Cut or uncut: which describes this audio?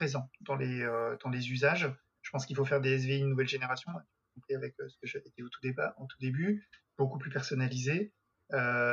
uncut